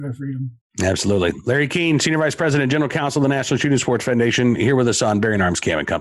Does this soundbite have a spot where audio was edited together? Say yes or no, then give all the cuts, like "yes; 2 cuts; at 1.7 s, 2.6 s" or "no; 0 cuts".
no; 0 cuts